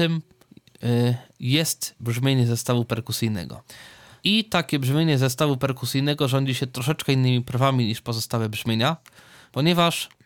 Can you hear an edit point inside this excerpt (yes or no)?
no